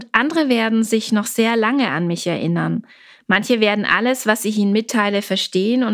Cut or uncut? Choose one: uncut